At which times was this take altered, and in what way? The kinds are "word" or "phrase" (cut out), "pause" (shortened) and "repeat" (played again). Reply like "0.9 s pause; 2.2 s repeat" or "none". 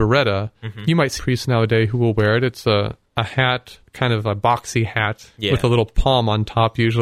1.2 s word; 3.0 s pause; 3.9 s pause